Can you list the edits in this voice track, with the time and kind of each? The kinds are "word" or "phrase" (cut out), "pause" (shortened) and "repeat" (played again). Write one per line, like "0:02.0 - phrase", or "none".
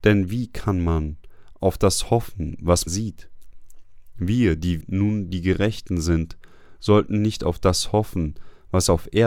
0:02.9 - word
0:04.8 - word

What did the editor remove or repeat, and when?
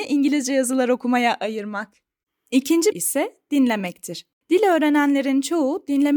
0:02.9 - word

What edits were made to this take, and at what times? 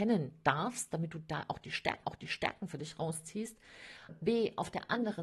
0:02.0 - repeat
0:04.1 - word

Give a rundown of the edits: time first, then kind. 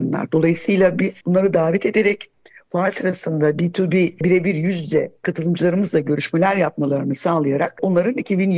none

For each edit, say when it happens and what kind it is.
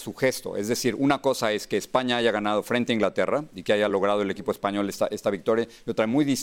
none

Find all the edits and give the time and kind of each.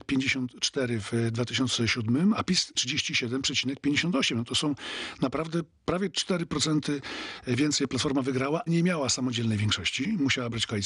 0:02.7 - word
0:08.7 - word

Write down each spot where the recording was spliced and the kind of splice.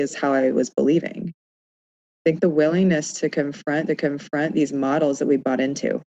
0:03.9 - repeat

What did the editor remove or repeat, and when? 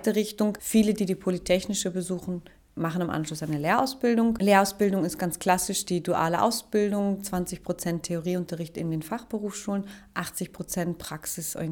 none

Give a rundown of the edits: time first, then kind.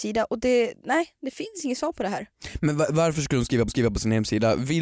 0:03.7 - repeat

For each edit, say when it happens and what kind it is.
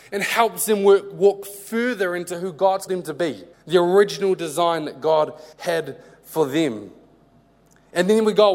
0:02.9 - word
0:03.5 - pause
0:05.5 - pause

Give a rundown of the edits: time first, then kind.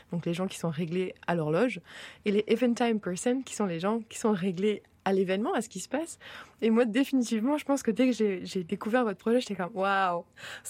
none

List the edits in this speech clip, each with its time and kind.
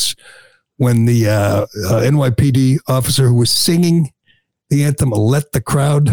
none

